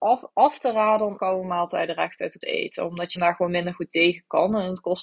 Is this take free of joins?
no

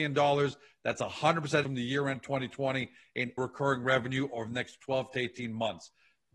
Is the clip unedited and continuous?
no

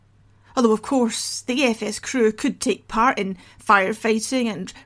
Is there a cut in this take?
no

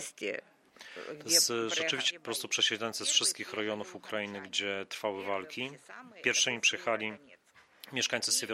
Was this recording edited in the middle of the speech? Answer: yes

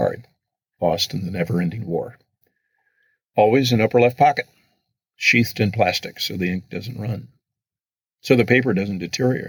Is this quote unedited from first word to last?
yes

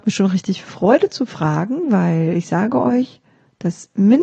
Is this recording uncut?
yes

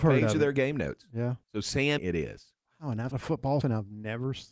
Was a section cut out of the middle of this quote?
yes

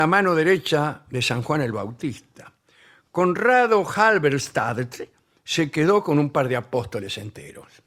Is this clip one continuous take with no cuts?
yes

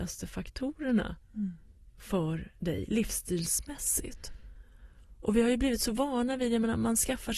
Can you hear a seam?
yes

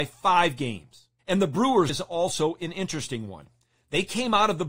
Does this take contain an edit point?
yes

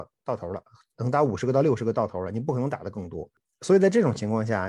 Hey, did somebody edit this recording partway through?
no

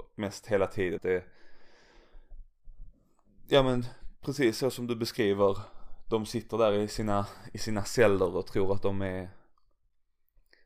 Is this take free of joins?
no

